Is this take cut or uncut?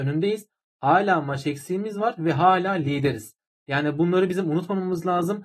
uncut